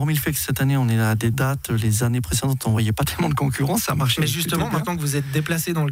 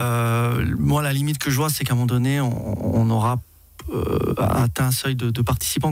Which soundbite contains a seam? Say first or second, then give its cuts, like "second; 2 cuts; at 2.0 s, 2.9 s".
first; 1 cut; at 1.3 s